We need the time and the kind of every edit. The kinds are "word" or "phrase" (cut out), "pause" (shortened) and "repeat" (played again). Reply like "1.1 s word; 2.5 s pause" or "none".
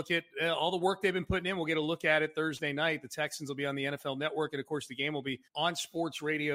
5.5 s pause